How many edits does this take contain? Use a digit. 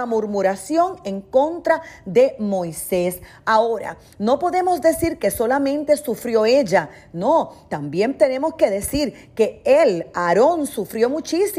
0